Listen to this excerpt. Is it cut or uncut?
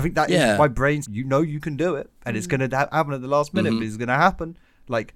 cut